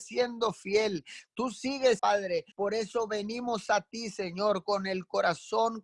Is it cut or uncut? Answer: cut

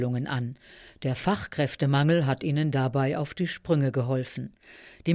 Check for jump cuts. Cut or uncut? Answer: uncut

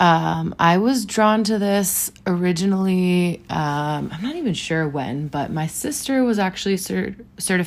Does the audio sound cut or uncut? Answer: uncut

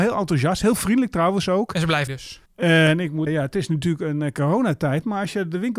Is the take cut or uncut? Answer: cut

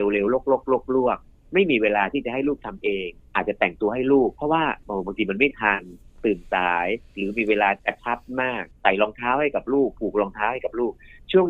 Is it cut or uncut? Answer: cut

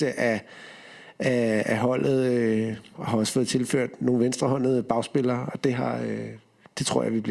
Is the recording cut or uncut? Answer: uncut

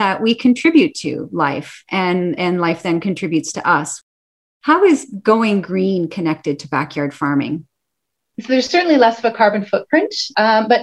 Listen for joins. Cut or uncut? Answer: uncut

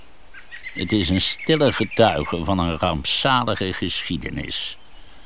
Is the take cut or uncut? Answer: uncut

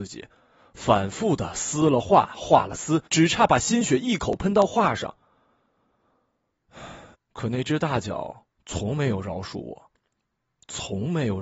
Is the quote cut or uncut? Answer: cut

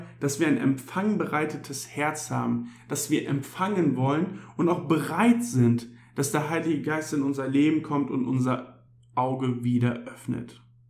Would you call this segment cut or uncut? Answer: uncut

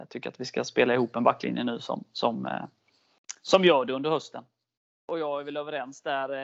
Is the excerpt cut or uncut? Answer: uncut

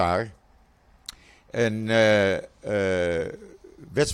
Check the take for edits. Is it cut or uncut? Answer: uncut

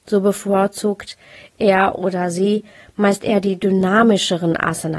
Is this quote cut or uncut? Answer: uncut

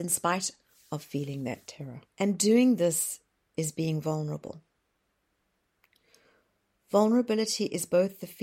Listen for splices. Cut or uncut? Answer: cut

